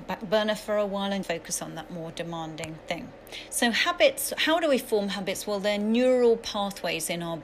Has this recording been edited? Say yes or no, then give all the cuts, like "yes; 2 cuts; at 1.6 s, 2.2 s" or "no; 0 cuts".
yes; 1 cut; at 1.2 s